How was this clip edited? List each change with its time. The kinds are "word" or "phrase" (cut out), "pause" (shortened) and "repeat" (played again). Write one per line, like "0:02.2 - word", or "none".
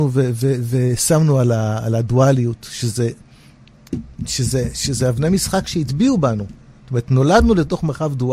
none